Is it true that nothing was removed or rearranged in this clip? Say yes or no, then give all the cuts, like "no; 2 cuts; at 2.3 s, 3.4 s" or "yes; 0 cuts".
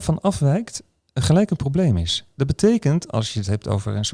yes; 0 cuts